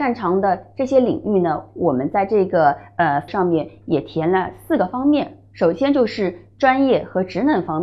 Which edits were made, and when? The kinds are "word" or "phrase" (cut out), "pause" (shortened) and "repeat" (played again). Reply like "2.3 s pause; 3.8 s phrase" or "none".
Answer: 3.3 s word